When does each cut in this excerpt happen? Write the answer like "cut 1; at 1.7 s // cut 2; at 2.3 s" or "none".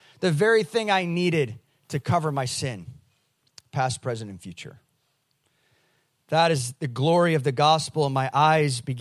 none